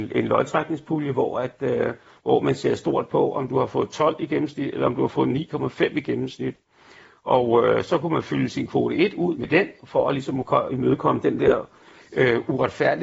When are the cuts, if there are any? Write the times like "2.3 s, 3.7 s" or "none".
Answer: 9.3 s